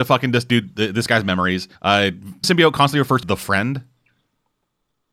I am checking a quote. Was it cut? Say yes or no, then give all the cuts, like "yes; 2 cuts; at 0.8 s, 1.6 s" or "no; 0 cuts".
yes; 3 cuts; at 1.7 s, 2.4 s, 3.2 s